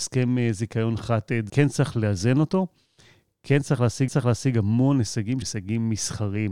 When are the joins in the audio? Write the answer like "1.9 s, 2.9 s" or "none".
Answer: 1.5 s, 4.1 s, 5.4 s